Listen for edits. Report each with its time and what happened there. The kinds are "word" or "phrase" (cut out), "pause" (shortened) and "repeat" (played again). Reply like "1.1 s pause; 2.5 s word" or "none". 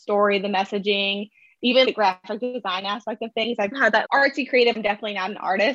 1.8 s word; 3.7 s word; 4.0 s word; 4.7 s word